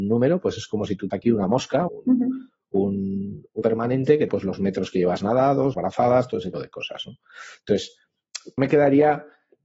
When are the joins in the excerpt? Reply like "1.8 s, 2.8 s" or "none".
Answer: 1.1 s, 1.9 s, 3.6 s, 4.3 s, 5.7 s, 6.5 s, 8.6 s